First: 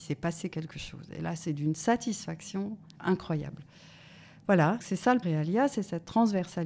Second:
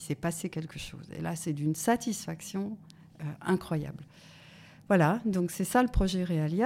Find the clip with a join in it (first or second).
first